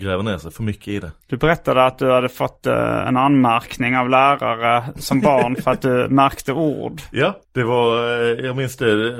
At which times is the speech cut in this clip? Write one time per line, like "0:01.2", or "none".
0:01.2
0:07.4

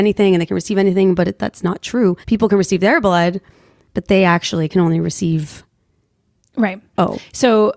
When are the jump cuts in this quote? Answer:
0:02.2

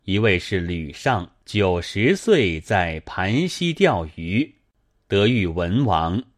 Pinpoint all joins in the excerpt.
0:01.4

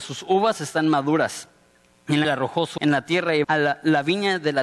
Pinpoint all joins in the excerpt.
0:02.2
0:02.8
0:03.4

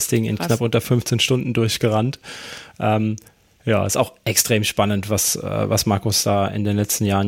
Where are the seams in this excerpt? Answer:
none

